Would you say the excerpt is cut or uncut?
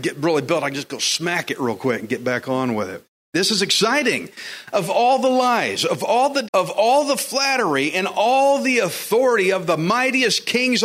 cut